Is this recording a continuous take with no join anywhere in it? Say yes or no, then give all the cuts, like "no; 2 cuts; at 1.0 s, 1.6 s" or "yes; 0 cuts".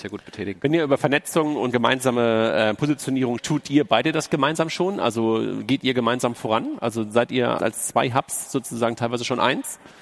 no; 3 cuts; at 1.7 s, 3.4 s, 7.6 s